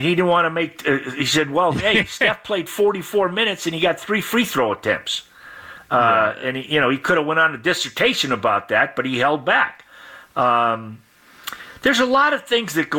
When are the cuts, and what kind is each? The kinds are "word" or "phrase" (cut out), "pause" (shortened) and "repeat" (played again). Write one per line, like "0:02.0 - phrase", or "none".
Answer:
none